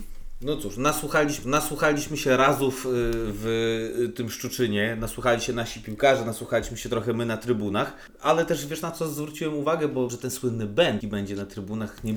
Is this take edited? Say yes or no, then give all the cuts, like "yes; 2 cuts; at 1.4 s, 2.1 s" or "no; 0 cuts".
yes; 3 cuts; at 1.4 s, 10.1 s, 11.0 s